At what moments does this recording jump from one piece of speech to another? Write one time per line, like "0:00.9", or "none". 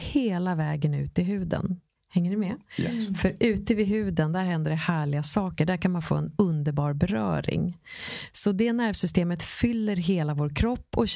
0:02.0